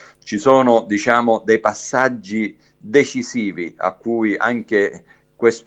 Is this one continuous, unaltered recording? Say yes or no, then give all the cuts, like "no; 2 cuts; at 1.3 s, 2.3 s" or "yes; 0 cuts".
yes; 0 cuts